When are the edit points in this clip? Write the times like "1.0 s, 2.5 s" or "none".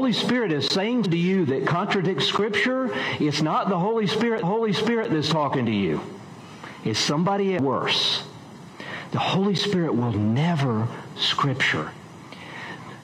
1.0 s, 4.4 s, 7.6 s, 11.2 s